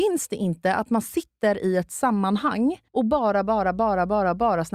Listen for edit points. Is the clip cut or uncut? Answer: cut